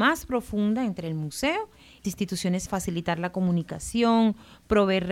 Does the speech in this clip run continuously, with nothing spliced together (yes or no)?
no